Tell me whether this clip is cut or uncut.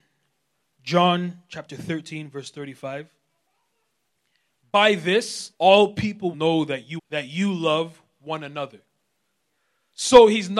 cut